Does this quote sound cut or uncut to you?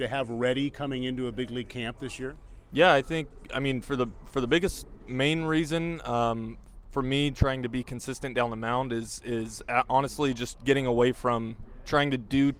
uncut